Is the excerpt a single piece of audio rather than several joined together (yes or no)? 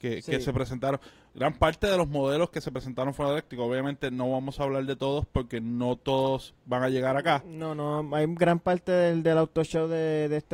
yes